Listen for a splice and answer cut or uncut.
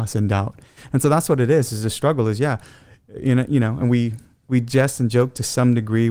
uncut